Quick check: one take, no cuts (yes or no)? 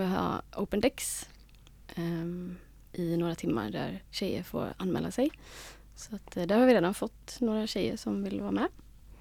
yes